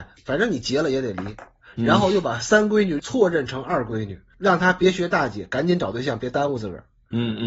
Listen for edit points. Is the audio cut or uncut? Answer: uncut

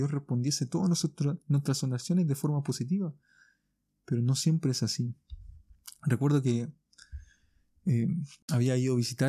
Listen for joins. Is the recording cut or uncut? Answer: uncut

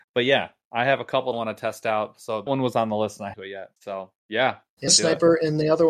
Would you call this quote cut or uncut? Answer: cut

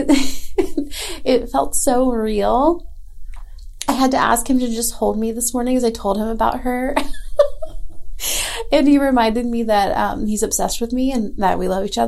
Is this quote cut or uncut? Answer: uncut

